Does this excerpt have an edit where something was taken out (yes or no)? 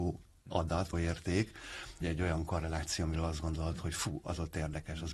yes